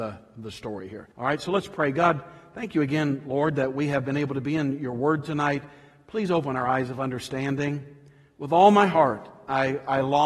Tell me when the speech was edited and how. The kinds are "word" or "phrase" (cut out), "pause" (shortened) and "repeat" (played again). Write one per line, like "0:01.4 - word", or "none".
0:01.1 - pause